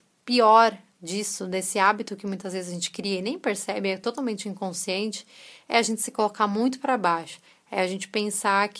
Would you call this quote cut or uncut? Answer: uncut